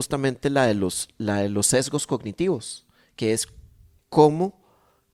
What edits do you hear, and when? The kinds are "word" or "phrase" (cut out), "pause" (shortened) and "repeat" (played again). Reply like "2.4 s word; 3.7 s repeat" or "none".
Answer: none